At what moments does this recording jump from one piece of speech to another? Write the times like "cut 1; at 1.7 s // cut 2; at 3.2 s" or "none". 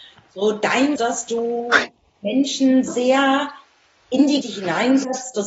cut 1; at 1.0 s // cut 2; at 2.9 s // cut 3; at 4.4 s